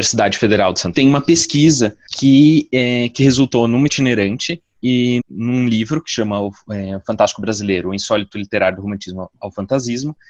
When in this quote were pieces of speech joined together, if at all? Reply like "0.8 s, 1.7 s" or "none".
0.9 s, 2.1 s, 3.9 s, 5.2 s